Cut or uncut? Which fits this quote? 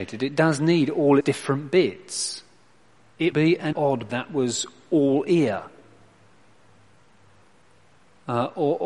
cut